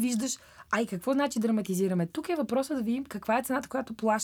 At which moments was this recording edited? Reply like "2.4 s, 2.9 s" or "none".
none